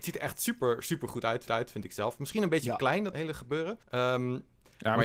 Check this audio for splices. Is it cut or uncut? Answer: cut